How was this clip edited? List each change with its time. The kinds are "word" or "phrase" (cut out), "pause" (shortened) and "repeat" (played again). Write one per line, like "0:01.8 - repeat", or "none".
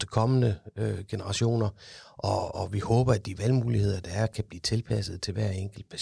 0:02.5 - word